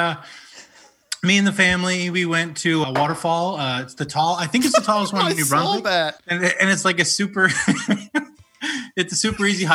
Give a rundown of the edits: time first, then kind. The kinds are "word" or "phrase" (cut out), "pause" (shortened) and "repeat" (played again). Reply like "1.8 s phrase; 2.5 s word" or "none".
2.8 s word; 6.2 s pause

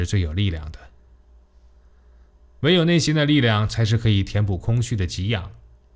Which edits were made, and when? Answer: none

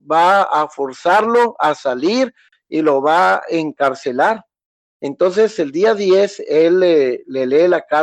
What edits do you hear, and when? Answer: none

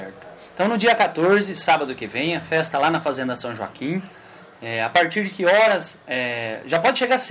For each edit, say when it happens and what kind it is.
none

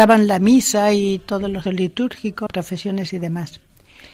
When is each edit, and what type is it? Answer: 1.7 s word; 2.5 s word

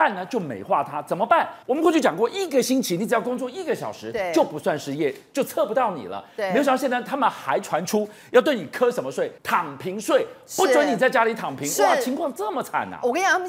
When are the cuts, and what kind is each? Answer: 1.6 s pause; 9.4 s pause

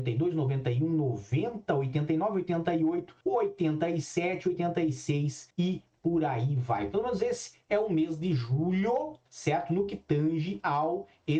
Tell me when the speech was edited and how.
3.2 s pause; 5.5 s pause; 9.3 s pause

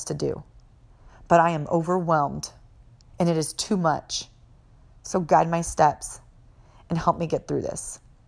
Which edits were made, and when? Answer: none

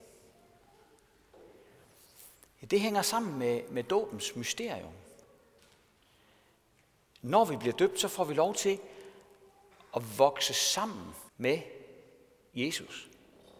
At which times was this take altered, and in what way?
11.3 s pause

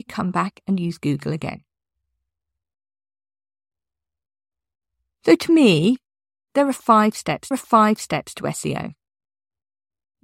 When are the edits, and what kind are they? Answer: 7.5 s repeat

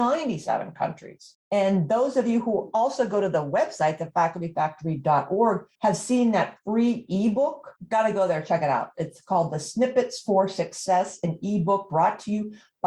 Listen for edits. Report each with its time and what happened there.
5.7 s pause; 7.8 s pause

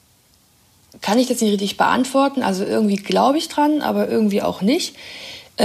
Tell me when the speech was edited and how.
none

